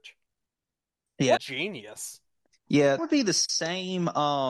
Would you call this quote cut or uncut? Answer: cut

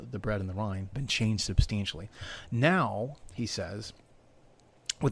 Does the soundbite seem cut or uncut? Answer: cut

